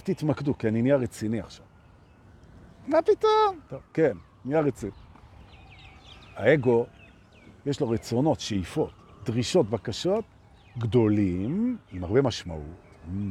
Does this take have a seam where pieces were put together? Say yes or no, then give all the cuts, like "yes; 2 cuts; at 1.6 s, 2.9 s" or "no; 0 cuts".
no; 0 cuts